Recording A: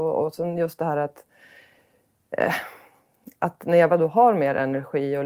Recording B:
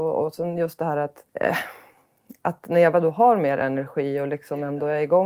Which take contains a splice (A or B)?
B